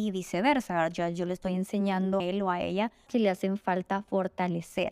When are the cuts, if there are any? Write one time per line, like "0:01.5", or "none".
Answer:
0:02.2
0:03.1